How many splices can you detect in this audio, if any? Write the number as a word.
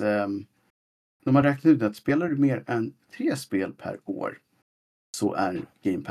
zero